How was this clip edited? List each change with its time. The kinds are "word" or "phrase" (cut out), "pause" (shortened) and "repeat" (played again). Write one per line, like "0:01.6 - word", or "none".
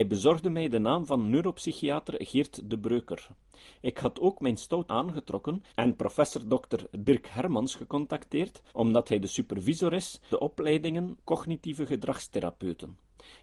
0:04.9 - word
0:05.7 - pause
0:08.7 - pause
0:10.3 - word
0:11.2 - phrase